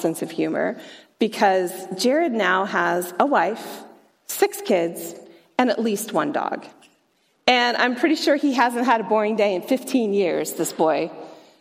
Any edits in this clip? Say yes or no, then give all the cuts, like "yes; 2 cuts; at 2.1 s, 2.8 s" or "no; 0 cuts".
no; 0 cuts